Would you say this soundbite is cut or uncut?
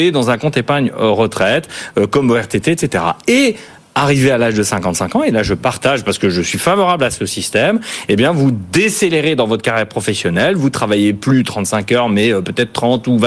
uncut